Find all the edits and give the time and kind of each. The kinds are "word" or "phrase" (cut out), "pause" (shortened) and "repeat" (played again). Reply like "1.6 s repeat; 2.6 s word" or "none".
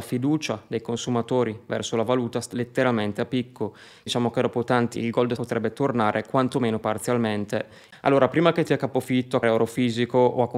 2.5 s word; 4.1 s word; 4.9 s word; 5.4 s word; 8.7 s word; 9.4 s word